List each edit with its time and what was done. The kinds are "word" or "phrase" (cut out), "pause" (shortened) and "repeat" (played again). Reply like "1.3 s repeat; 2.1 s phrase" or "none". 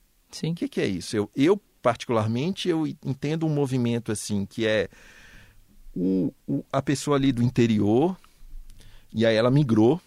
none

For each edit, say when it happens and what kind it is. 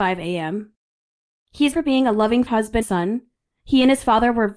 1.7 s word; 2.5 s word; 2.8 s word

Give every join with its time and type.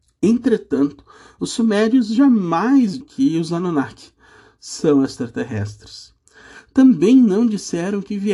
3.0 s word

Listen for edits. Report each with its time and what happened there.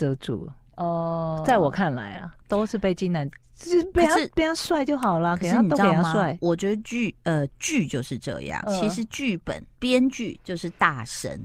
8.6 s word; 9.7 s pause

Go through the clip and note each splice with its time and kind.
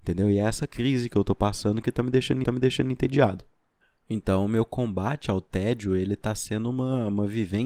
2.4 s repeat

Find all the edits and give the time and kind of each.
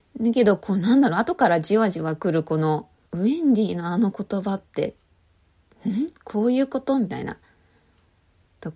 3.1 s word

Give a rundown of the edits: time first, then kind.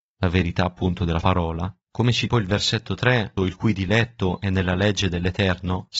1.2 s word; 1.8 s pause; 2.3 s word; 3.4 s phrase

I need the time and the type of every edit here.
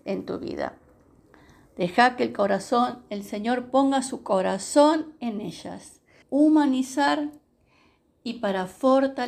6.2 s word

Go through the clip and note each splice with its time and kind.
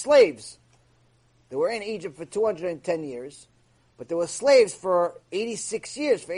none

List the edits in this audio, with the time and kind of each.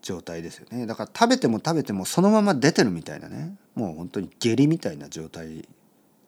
3.6 s pause

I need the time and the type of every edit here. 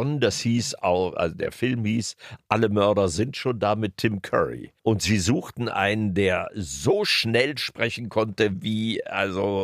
4.8 s pause

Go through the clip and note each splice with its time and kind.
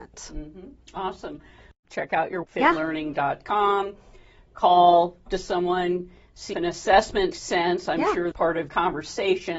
2.4 s word; 5.3 s word; 6.5 s word; 7.3 s word; 8.3 s word; 8.7 s word

